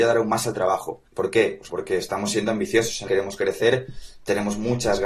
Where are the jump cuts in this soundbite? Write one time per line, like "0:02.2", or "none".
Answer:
0:01.1
0:01.7
0:03.1